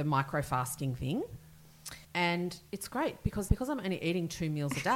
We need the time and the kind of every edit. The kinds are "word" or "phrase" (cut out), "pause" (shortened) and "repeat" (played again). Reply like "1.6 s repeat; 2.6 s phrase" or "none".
2.0 s pause; 3.5 s word